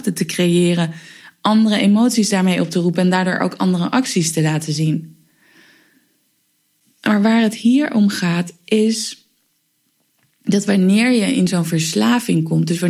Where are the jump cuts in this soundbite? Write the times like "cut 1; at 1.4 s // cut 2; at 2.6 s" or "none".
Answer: none